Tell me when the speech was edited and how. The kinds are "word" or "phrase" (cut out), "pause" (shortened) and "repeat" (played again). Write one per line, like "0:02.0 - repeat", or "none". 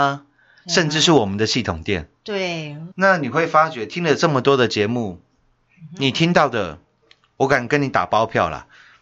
0:02.9 - pause